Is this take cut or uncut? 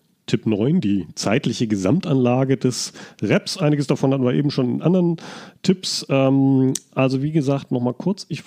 uncut